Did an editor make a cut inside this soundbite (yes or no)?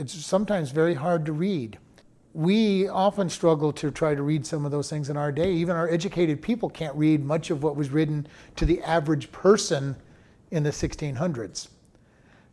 no